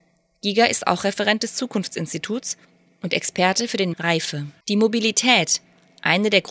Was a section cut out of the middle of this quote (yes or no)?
yes